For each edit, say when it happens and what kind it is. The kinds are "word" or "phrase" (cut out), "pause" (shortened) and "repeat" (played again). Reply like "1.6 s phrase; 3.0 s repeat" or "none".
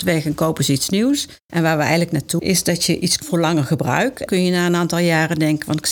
1.4 s pause; 2.4 s word; 3.2 s word; 4.3 s word